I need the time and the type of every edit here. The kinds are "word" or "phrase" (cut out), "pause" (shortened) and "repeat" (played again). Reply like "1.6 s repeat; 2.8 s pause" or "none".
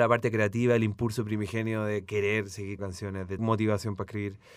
2.8 s word; 3.4 s word